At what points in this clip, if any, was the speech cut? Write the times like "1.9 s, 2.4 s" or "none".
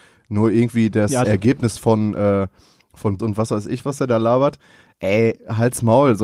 1.2 s, 3.2 s, 3.8 s

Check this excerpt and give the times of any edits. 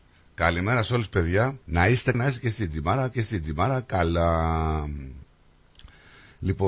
1.6 s, 2.1 s, 3.1 s

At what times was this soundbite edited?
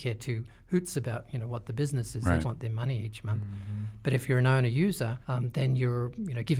2.4 s, 5.2 s

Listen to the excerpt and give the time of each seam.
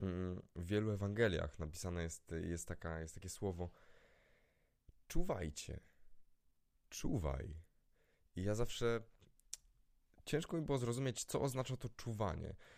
none

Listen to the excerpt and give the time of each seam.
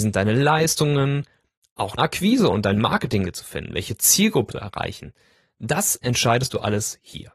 2.0 s, 3.2 s, 4.5 s

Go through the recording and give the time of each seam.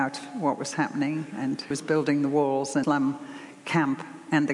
1.7 s, 2.8 s

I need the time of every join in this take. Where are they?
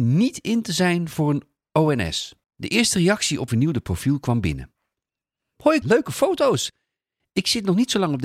2.4 s, 3.5 s, 5.8 s

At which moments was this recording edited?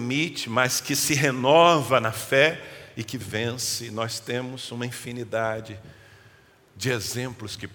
none

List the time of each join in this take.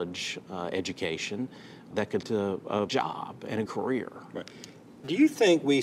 1.9 s, 2.2 s, 2.9 s, 3.7 s

